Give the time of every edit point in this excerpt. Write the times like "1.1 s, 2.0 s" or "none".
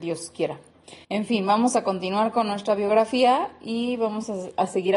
1.0 s